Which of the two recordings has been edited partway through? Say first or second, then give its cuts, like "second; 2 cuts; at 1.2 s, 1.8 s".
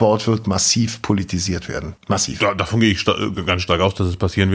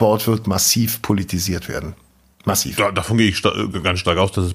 first; 1 cut; at 2.0 s